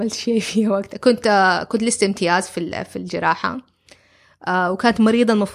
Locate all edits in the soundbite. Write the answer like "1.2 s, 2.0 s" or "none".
none